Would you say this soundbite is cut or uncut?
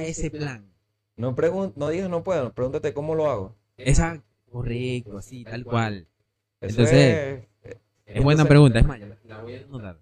uncut